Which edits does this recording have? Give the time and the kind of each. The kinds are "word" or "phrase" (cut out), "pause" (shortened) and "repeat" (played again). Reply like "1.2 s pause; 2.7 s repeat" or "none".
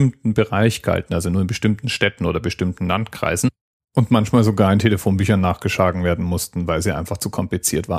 none